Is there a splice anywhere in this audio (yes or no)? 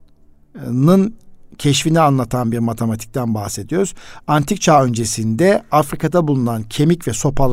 no